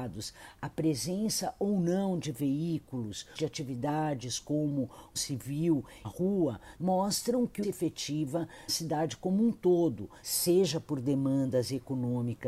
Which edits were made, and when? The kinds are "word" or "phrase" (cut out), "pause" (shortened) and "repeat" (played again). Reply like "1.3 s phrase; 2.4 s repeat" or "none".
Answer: 3.4 s word; 5.2 s word; 6.0 s phrase; 7.6 s phrase; 8.7 s word